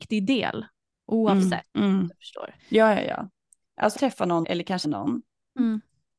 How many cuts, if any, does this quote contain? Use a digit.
5